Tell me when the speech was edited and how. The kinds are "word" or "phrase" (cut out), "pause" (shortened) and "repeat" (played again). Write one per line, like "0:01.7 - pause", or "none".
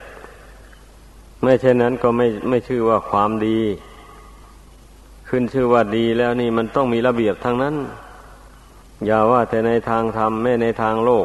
0:08.8 - pause